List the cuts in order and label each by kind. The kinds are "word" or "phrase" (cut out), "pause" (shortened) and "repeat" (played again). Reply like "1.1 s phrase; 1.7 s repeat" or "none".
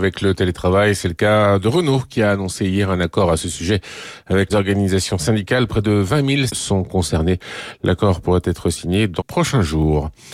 4.5 s word; 6.5 s word; 9.2 s word